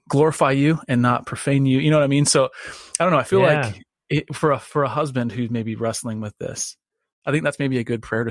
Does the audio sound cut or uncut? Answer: uncut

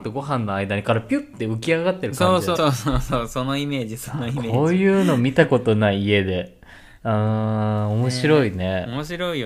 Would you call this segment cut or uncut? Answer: cut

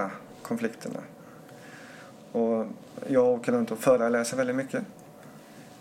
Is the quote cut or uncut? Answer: uncut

